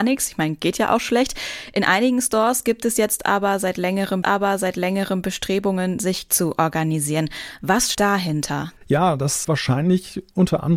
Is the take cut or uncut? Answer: cut